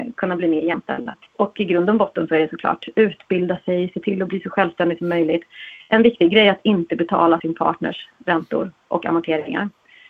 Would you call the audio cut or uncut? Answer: cut